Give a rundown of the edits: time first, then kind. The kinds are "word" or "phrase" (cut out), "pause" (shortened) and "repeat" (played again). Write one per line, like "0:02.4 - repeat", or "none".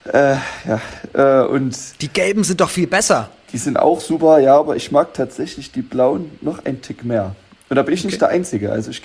none